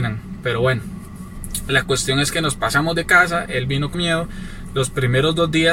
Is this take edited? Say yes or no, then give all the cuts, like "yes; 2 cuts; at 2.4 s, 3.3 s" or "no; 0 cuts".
yes; 1 cut; at 3.9 s